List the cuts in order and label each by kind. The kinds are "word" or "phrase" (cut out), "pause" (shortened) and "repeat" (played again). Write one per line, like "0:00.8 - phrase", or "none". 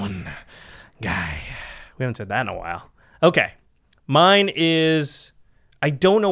none